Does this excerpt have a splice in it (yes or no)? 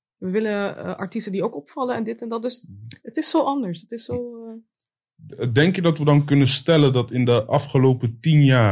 no